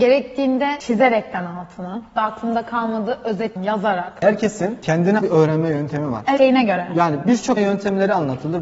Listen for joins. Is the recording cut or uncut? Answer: cut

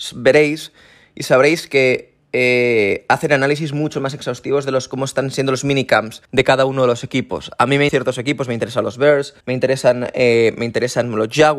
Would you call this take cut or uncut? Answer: cut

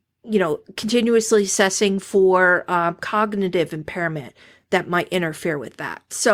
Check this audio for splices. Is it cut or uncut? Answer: uncut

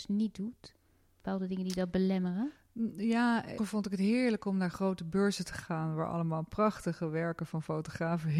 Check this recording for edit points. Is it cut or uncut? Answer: cut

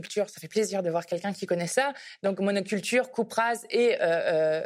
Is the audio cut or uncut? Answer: uncut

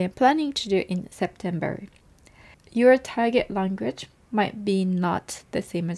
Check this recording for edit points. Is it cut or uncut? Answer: uncut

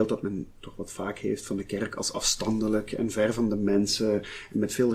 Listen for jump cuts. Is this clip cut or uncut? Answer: uncut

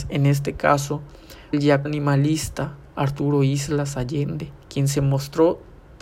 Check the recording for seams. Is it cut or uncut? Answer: cut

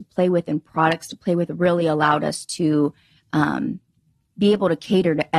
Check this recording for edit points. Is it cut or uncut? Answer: uncut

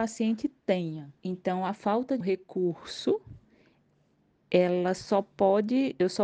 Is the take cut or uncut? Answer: cut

